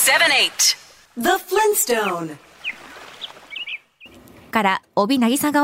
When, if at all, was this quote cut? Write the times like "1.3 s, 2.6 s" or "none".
1.0 s, 4.5 s